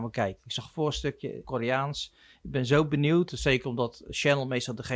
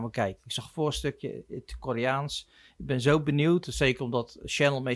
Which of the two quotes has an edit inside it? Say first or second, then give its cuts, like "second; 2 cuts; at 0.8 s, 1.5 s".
first; 1 cut; at 1.4 s